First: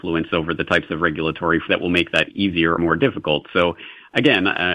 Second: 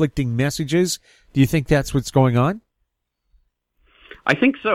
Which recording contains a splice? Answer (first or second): first